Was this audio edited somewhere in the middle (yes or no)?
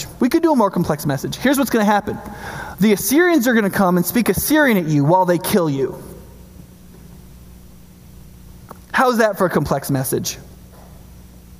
no